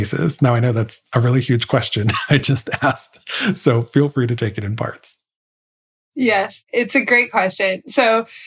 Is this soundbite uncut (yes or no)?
yes